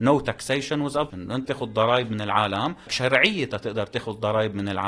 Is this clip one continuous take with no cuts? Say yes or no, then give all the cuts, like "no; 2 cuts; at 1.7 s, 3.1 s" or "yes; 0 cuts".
no; 3 cuts; at 1.1 s, 1.4 s, 2.9 s